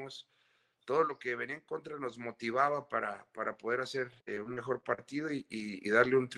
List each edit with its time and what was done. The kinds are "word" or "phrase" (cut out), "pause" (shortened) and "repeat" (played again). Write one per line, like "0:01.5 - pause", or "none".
0:04.2 - pause